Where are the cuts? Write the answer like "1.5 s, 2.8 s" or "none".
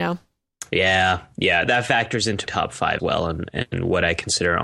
1.7 s, 2.5 s, 3.0 s